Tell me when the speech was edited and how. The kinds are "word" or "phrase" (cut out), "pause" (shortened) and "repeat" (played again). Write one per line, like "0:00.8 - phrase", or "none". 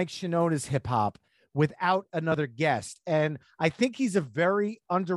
none